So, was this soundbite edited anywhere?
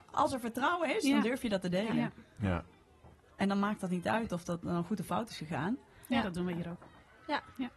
no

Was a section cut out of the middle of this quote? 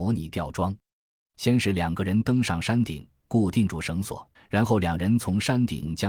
yes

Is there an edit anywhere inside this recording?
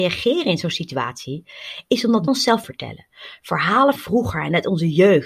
yes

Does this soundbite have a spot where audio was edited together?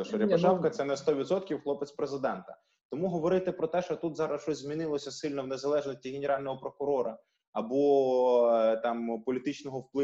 no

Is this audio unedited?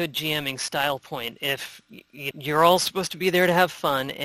no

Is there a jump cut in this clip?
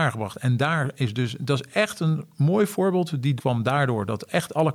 yes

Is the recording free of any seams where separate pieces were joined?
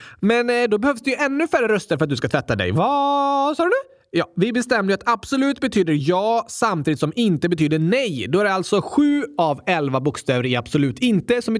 yes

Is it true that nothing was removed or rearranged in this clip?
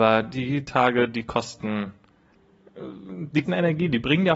no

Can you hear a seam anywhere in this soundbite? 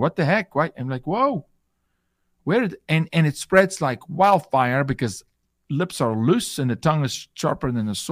no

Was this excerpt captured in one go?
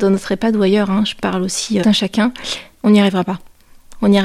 no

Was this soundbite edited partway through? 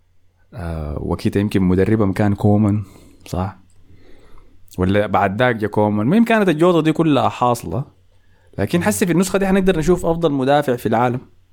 no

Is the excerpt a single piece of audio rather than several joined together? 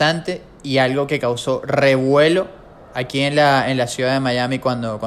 yes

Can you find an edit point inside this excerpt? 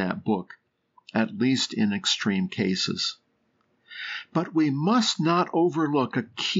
no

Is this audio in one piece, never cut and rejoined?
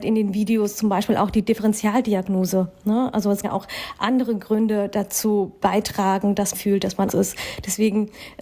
no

